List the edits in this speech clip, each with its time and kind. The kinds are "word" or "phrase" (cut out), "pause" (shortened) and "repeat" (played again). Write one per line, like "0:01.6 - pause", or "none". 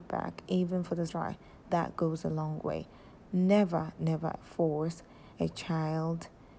0:01.1 - word
0:01.6 - pause
0:04.0 - word
0:05.3 - pause